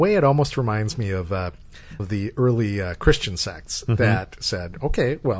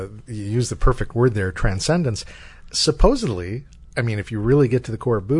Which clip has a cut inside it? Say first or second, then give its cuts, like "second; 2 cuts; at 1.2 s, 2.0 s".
first; 1 cut; at 2.0 s